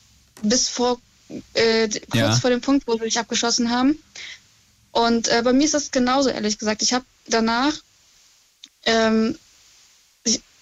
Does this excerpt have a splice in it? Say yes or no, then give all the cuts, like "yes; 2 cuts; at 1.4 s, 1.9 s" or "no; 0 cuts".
no; 0 cuts